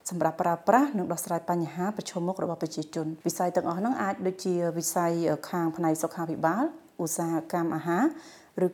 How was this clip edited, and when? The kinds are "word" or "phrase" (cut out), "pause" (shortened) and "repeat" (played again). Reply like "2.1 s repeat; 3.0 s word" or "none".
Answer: 3.2 s pause

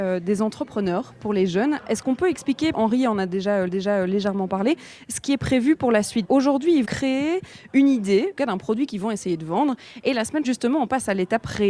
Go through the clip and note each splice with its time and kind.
2.7 s phrase; 3.7 s repeat; 6.2 s word; 6.8 s word; 8.4 s phrase; 10.4 s word

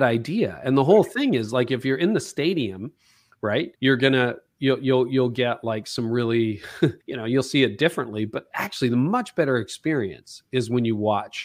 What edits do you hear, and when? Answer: 3.7 s pause; 7.0 s pause

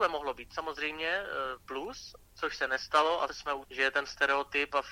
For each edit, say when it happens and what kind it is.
3.3 s word; 3.6 s word

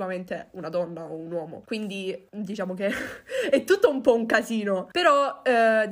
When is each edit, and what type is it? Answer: none

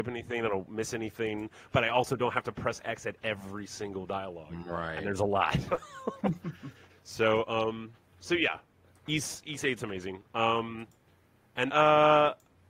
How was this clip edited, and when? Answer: 11.7 s word

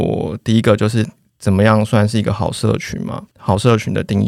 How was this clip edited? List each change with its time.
none

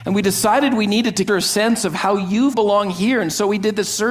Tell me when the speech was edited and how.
1.3 s word; 2.5 s phrase

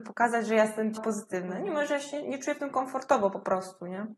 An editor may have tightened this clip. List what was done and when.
1.0 s word

